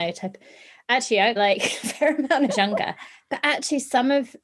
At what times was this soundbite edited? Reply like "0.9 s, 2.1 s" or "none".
1.4 s, 2.5 s